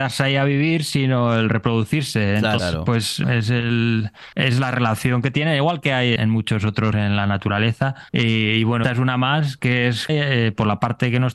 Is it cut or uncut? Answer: cut